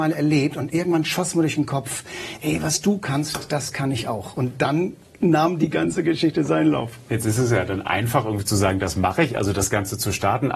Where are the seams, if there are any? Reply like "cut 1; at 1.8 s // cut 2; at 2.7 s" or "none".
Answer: none